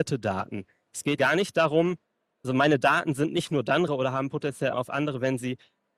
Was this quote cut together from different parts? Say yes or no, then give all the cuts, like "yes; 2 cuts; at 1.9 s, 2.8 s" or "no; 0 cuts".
yes; 4 cuts; at 1.2 s, 2.4 s, 3.9 s, 4.7 s